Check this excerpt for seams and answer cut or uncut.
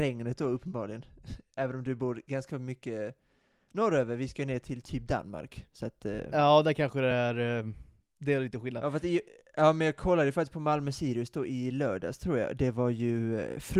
uncut